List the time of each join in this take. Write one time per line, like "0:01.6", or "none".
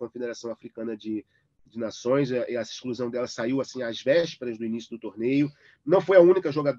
none